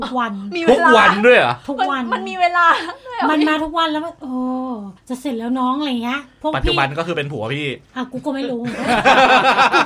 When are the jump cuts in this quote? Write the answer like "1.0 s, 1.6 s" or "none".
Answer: 5.0 s